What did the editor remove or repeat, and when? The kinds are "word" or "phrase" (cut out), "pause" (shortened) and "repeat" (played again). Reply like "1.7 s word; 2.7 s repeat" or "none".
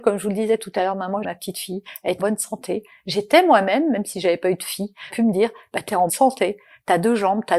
1.2 s word; 2.2 s word; 5.1 s word; 6.1 s word